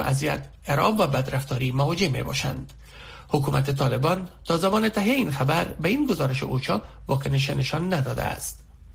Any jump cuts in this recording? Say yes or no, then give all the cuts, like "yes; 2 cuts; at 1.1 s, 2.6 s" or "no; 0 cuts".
no; 0 cuts